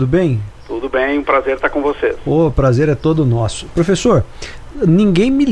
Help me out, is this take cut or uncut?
uncut